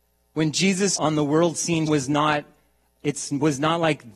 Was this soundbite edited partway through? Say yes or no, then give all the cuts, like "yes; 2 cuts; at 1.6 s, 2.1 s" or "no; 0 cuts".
yes; 2 cuts; at 1.0 s, 1.9 s